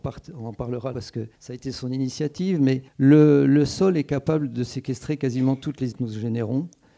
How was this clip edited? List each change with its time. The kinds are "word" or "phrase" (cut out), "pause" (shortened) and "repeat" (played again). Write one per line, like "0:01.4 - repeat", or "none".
0:00.9 - word
0:01.3 - pause
0:02.9 - pause
0:05.9 - word